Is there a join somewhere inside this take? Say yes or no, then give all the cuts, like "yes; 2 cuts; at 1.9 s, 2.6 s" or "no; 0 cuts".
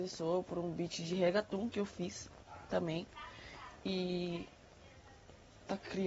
no; 0 cuts